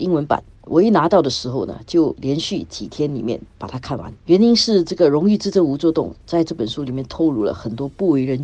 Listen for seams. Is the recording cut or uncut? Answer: cut